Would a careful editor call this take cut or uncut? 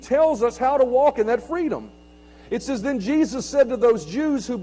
uncut